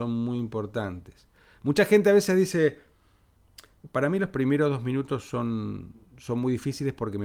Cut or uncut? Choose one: uncut